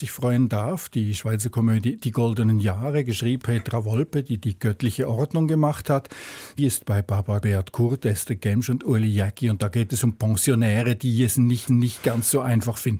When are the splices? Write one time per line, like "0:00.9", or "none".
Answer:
0:03.4
0:06.6
0:07.4
0:11.7